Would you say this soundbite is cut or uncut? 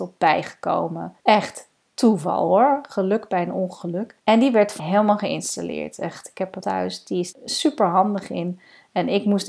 cut